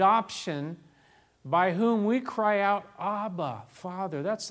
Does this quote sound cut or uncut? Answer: uncut